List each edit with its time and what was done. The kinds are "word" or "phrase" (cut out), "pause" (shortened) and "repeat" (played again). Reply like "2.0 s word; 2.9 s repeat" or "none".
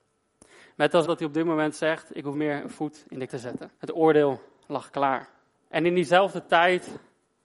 1.0 s word; 2.3 s word; 3.3 s word; 3.8 s pause; 5.5 s pause